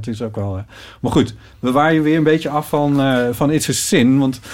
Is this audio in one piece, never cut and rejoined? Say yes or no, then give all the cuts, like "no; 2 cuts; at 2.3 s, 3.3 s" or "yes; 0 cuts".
yes; 0 cuts